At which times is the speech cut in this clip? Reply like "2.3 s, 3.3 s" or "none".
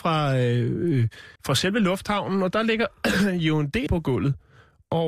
1.4 s, 3.9 s